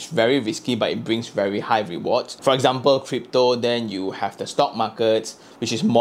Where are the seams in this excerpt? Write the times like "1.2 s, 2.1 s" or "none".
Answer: none

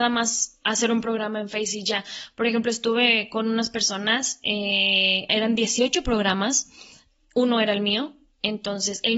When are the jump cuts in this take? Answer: none

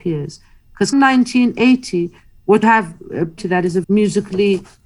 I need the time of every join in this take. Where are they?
0.9 s, 2.6 s, 3.4 s, 3.8 s

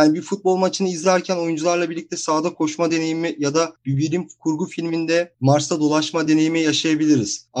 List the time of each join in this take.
none

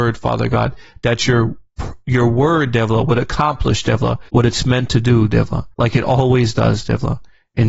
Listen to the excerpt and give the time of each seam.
4.3 s, 5.7 s

